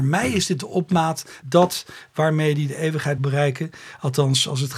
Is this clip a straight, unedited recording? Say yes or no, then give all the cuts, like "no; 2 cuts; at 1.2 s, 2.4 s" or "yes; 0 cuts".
no; 2 cuts; at 1.4 s, 3.2 s